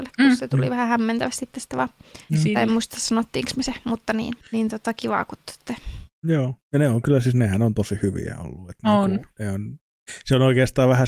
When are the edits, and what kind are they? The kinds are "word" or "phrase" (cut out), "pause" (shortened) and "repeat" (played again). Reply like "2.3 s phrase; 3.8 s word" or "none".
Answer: 2.2 s pause; 4.4 s pause; 6.1 s pause

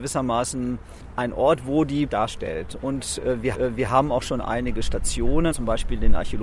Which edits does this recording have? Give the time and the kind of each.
2.1 s phrase; 3.5 s repeat; 5.5 s word

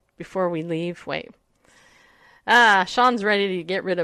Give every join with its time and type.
none

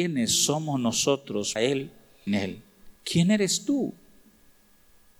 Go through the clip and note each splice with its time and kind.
1.6 s word; 2.3 s phrase; 3.0 s pause

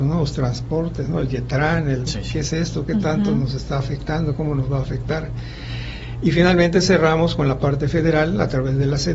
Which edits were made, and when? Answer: 2.1 s word

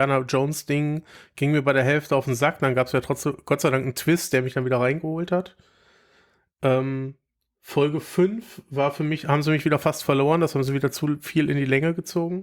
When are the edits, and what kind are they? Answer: none

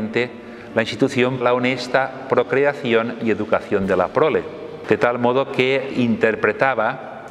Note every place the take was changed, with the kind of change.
1.4 s word; 5.9 s word

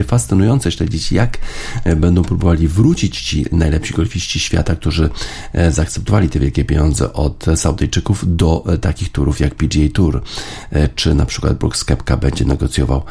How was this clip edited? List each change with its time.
none

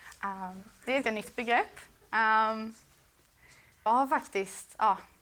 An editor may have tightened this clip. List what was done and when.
1.0 s word; 3.9 s word

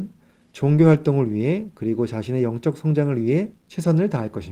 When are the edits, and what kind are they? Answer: 3.6 s pause

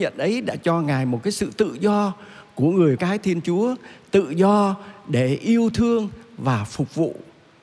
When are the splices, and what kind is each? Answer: 3.0 s word

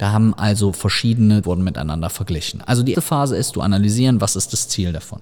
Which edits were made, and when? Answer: 1.4 s word; 2.9 s word; 3.5 s phrase

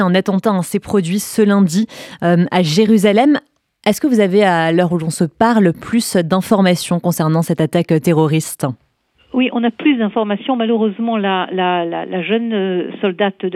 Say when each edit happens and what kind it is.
none

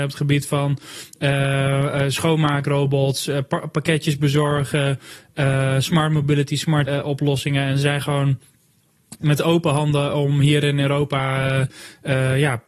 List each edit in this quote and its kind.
6.9 s word; 9.2 s word

